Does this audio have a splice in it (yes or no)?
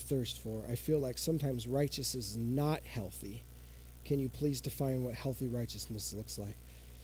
no